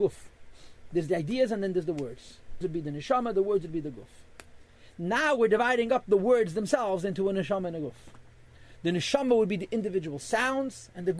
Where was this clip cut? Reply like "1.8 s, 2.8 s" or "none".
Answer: 2.6 s